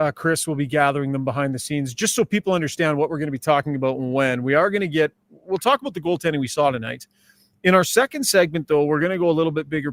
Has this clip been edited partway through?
no; 0 cuts

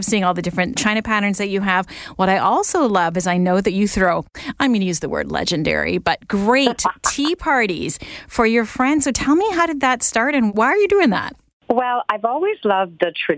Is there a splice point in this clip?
no; 0 cuts

